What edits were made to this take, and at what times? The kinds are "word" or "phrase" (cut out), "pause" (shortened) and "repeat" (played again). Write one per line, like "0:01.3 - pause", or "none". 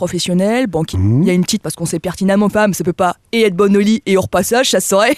0:00.9 - word
0:01.6 - word
0:02.5 - word